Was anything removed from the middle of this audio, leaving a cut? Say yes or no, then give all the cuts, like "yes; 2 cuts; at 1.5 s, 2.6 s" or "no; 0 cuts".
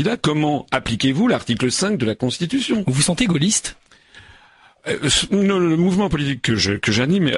no; 0 cuts